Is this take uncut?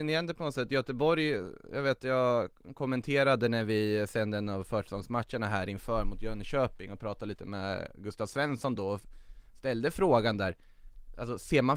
yes; 0 cuts

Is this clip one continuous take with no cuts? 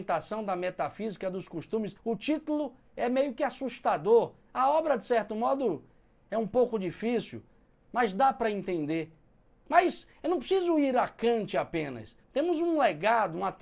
no; 2 cuts; at 2.0 s, 12.2 s

